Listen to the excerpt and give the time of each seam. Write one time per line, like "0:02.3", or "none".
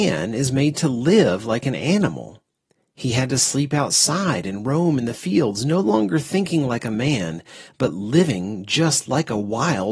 none